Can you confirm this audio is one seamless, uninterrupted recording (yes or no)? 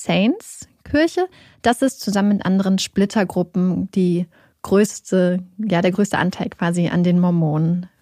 yes